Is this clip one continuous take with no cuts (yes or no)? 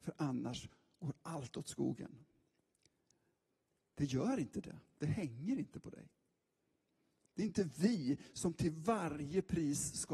yes